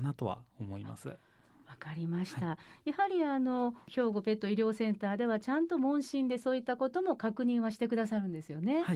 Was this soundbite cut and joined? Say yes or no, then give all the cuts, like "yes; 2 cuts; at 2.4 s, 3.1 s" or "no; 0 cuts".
no; 0 cuts